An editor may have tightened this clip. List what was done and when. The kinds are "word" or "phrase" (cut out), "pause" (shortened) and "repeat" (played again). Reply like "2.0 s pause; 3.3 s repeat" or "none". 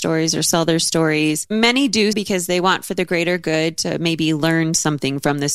2.1 s word